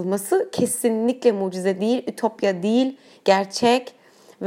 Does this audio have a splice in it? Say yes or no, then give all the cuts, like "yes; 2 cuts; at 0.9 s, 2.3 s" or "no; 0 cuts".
no; 0 cuts